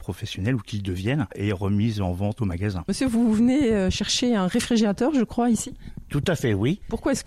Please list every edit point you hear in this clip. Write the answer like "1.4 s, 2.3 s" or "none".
none